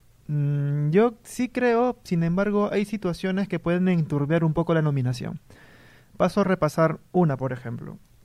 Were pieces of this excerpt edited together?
no; 0 cuts

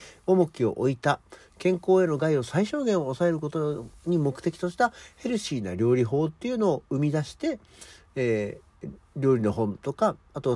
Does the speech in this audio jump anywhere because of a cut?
no; 0 cuts

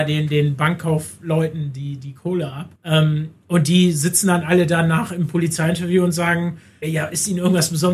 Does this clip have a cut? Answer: yes; 2 cuts; at 2.8 s, 6.8 s

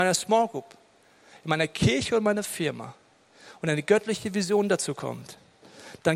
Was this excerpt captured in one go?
yes; 0 cuts

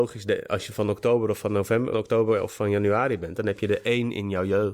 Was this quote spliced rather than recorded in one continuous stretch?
yes; 1 cut; at 1.9 s

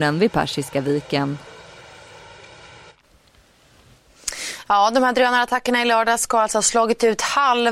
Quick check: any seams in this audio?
no; 0 cuts

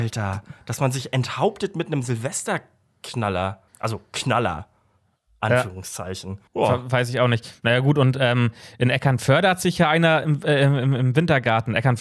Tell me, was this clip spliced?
yes; 2 cuts; at 3.7 s, 6.5 s

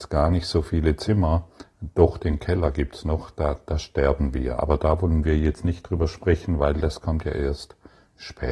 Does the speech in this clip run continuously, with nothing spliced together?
yes; 0 cuts

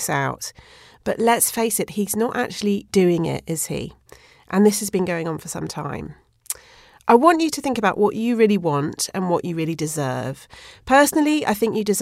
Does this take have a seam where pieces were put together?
no; 0 cuts

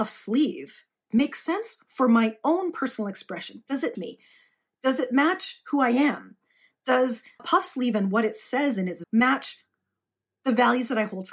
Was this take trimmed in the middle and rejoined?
yes; 3 cuts; at 3.9 s, 7.4 s, 9.0 s

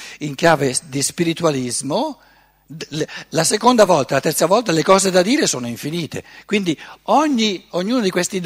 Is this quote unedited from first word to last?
yes; 0 cuts

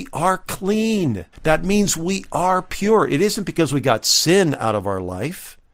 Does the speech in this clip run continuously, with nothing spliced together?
no; 1 cut; at 1.3 s

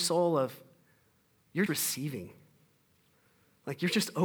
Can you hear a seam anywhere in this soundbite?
yes; 1 cut; at 1.7 s

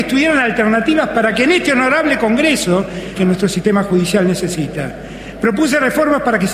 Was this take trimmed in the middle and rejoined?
yes; 1 cut; at 3.1 s

